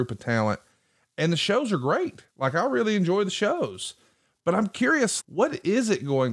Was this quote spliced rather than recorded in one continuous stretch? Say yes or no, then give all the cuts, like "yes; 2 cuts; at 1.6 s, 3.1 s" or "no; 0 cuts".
yes; 1 cut; at 5.2 s